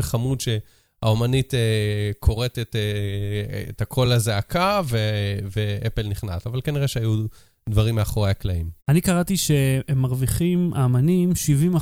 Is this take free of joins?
yes; 0 cuts

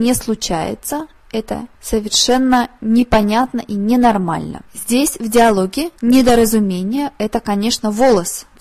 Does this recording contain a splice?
yes; 3 cuts; at 1.7 s, 4.7 s, 6.0 s

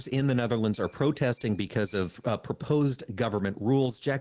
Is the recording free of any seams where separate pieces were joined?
yes; 0 cuts

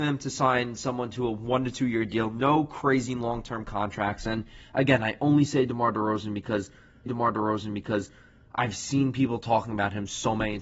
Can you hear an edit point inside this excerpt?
yes; 1 cut; at 7.1 s

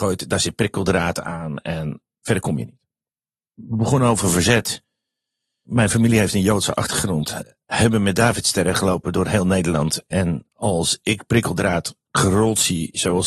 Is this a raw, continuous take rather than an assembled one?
yes; 0 cuts

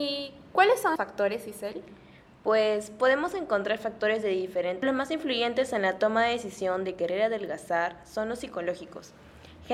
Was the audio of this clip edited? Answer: yes; 2 cuts; at 1.0 s, 4.8 s

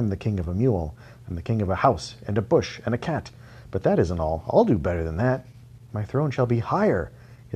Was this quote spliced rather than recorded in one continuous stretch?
no; 0 cuts

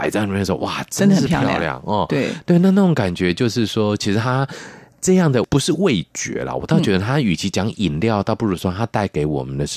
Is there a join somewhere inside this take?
no; 0 cuts

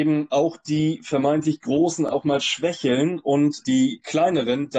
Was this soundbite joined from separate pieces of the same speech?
yes; 1 cut; at 3.6 s

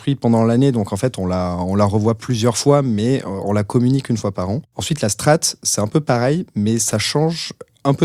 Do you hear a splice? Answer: no; 0 cuts

